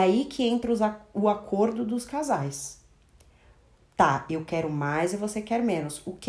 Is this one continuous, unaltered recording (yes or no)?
yes